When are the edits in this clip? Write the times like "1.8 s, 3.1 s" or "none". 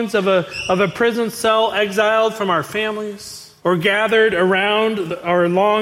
3.6 s